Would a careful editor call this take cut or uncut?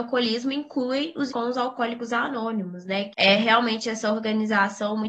cut